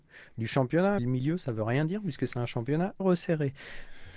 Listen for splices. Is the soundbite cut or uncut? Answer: cut